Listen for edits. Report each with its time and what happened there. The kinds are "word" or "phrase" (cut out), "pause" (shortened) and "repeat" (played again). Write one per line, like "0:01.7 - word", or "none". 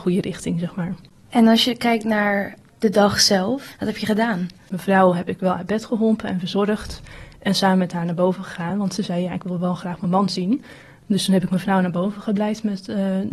none